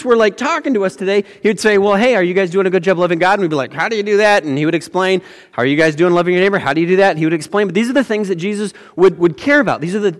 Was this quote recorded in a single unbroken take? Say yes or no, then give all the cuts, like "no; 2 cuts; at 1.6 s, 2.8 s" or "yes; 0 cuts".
yes; 0 cuts